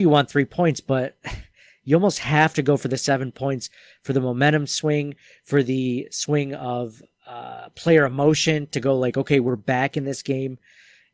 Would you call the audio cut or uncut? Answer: uncut